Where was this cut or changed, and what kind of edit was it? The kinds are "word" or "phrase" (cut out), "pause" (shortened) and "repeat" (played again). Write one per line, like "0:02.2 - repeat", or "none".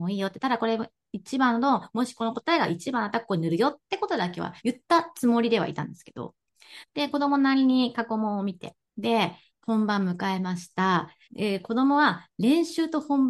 0:04.6 - pause
0:08.9 - pause
0:11.2 - pause